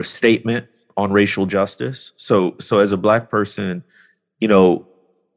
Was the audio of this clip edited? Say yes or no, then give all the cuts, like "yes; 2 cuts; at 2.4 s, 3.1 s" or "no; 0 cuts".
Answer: no; 0 cuts